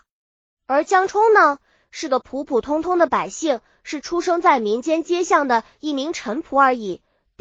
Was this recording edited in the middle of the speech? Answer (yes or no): no